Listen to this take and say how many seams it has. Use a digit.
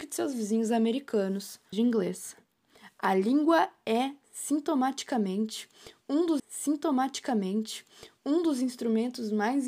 2